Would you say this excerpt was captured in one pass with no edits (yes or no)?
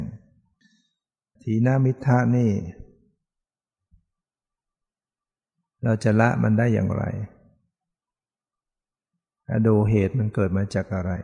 yes